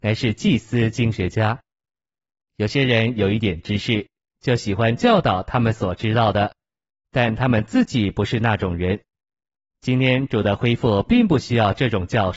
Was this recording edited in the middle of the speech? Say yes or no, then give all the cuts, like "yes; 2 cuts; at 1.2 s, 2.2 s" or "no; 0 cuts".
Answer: no; 0 cuts